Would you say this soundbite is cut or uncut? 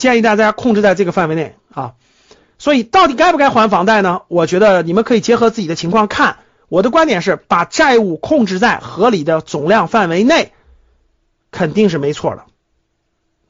uncut